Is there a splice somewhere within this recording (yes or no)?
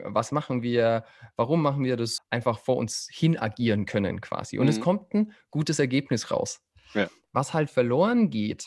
yes